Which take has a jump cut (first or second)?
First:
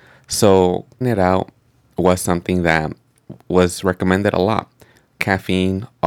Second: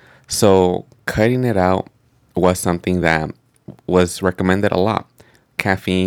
first